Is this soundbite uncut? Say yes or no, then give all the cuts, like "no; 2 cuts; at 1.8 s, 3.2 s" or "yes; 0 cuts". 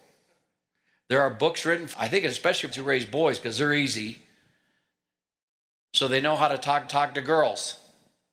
no; 3 cuts; at 1.9 s, 2.7 s, 6.9 s